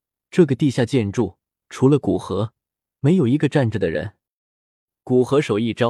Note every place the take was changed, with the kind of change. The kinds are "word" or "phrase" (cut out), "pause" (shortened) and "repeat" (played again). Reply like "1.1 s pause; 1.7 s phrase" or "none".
none